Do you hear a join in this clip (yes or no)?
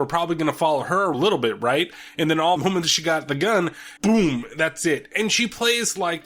yes